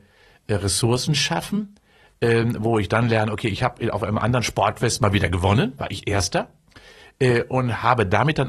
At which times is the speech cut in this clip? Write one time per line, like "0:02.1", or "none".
none